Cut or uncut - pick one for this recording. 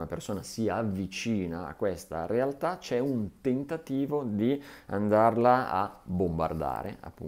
uncut